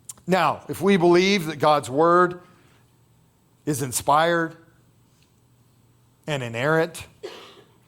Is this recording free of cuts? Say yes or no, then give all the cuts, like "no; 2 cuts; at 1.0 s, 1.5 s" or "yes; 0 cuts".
yes; 0 cuts